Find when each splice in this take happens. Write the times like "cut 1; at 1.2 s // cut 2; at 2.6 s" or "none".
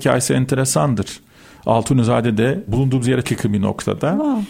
cut 1; at 2.7 s // cut 2; at 3.2 s

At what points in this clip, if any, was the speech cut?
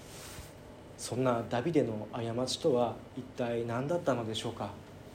cut 1; at 1.0 s

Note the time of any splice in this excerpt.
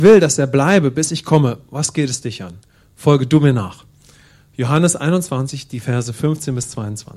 none

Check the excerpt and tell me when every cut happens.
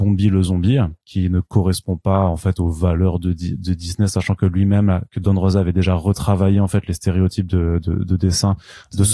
cut 1; at 1.0 s

